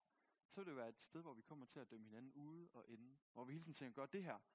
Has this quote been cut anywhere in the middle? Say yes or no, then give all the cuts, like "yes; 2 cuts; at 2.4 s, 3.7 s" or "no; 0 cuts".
yes; 1 cut; at 3.2 s